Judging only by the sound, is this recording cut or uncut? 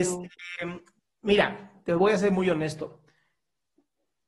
cut